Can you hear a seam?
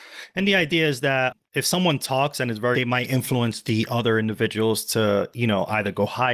yes; 2 cuts; at 1.4 s, 2.7 s

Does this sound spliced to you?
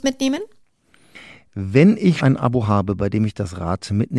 yes; 1 cut; at 2.2 s

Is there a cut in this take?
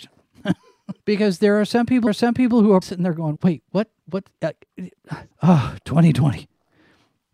yes; 5 cuts; at 1.0 s, 2.1 s, 2.8 s, 3.4 s, 5.3 s

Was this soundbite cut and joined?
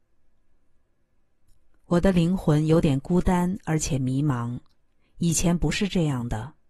no; 0 cuts

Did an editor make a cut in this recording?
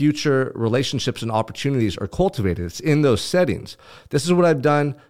no; 0 cuts

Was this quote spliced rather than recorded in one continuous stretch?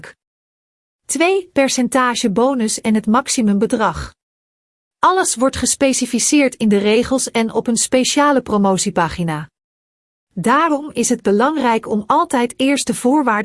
no; 0 cuts

